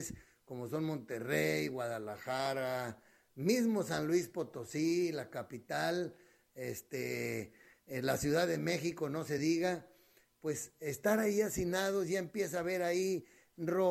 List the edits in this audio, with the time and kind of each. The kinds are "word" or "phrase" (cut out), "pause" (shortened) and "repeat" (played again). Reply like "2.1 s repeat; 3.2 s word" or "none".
none